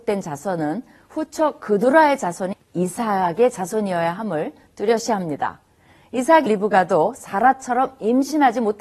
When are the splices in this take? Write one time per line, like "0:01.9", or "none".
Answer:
0:02.5
0:06.5

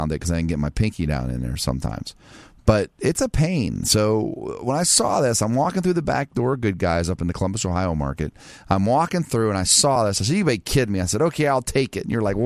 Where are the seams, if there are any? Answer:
none

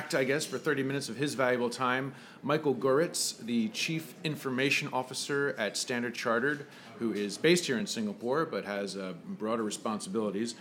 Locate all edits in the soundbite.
none

